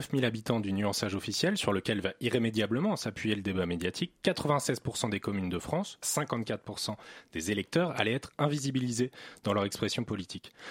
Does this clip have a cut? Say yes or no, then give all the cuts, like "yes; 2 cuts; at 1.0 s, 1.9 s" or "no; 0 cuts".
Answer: yes; 1 cut; at 6.0 s